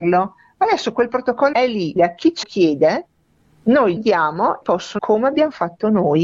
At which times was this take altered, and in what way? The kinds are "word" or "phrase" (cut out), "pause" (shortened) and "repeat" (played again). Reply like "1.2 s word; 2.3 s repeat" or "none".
1.5 s word; 2.0 s word; 2.4 s word; 4.0 s word; 4.6 s phrase; 5.0 s word